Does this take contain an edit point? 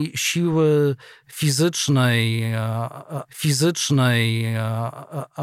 yes; 1 cut; at 3.3 s

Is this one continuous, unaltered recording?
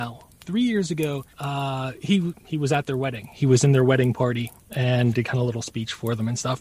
no; 2 cuts; at 1.3 s, 5.1 s

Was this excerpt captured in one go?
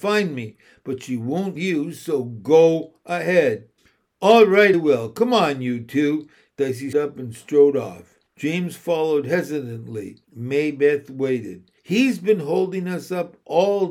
no; 7 cuts; at 1.5 s, 3.8 s, 4.7 s, 6.9 s, 8.3 s, 10.2 s, 11.8 s

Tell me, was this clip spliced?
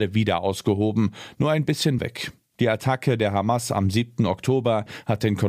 yes; 1 cut; at 2.0 s

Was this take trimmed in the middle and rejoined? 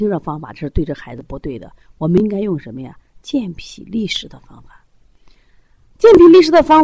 no; 0 cuts

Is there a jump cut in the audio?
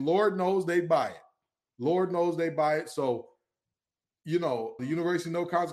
yes; 1 cut; at 4.8 s

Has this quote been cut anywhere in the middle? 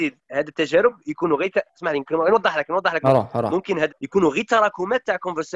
yes; 1 cut; at 3.9 s

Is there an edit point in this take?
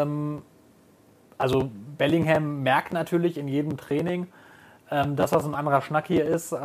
no; 0 cuts

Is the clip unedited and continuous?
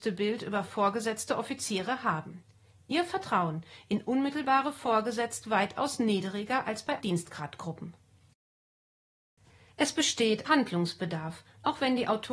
no; 3 cuts; at 5.4 s, 7.0 s, 10.5 s

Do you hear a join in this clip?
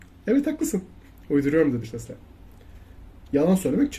yes; 1 cut; at 1.8 s

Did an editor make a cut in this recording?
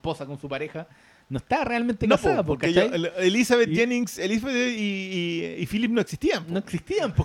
no; 0 cuts

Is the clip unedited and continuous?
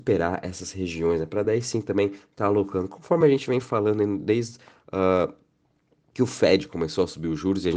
yes; 0 cuts

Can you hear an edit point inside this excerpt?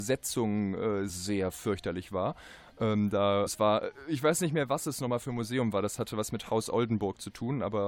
yes; 2 cuts; at 1.1 s, 3.5 s

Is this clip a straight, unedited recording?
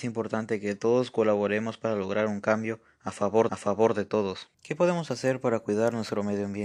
no; 2 cuts; at 3.5 s, 4.5 s

